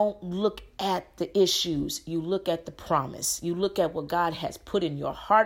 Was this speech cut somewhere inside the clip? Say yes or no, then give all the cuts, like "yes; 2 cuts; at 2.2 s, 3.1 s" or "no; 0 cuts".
no; 0 cuts